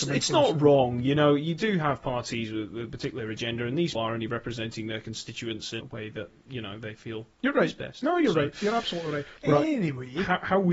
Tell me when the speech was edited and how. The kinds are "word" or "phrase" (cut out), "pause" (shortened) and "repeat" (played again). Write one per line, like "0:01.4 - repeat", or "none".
0:03.9 - word
0:05.8 - word
0:09.4 - pause